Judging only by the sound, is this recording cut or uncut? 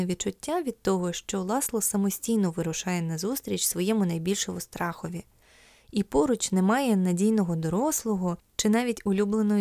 uncut